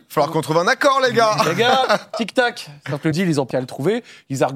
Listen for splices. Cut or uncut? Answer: cut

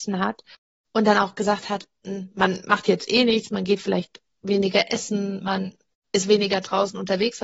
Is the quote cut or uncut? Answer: uncut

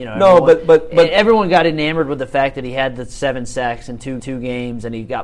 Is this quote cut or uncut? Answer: cut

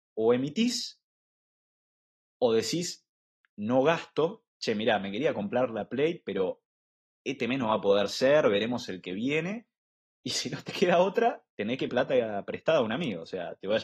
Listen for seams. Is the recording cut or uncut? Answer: cut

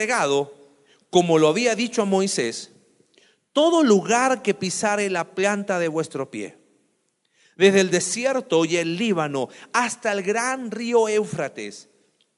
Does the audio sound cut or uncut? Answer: uncut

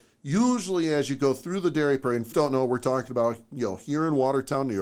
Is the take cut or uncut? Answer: cut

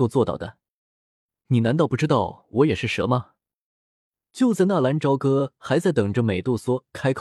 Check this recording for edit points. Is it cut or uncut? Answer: uncut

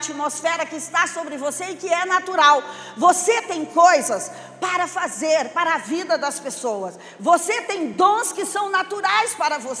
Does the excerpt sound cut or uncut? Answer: uncut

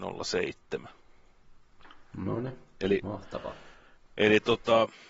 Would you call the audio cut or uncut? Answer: uncut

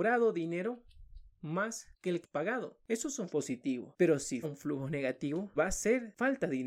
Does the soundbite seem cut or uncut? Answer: cut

